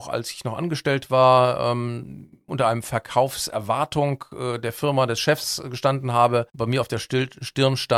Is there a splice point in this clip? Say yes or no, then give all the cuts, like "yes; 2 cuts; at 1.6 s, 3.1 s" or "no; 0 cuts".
yes; 1 cut; at 6.5 s